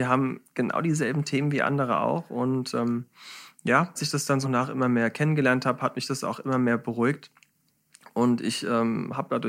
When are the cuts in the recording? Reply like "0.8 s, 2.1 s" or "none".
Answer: 4.0 s, 4.4 s